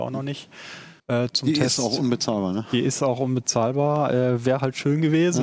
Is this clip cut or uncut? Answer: cut